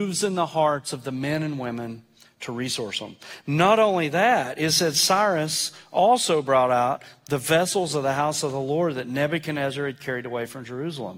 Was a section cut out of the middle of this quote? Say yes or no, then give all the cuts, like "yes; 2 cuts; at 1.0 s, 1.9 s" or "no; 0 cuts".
no; 0 cuts